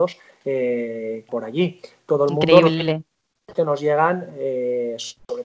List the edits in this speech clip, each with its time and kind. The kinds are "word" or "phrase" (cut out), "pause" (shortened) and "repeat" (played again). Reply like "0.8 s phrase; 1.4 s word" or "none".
1.3 s word; 3.6 s word